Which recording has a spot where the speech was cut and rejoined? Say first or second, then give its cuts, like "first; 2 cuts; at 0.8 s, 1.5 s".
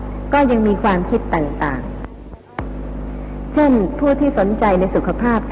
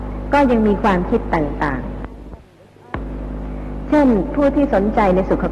first; 1 cut; at 2.4 s